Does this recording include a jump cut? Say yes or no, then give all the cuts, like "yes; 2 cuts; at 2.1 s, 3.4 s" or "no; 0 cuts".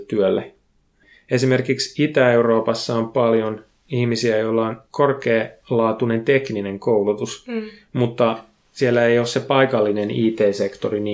yes; 1 cut; at 4.9 s